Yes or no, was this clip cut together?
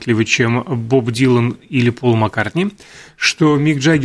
no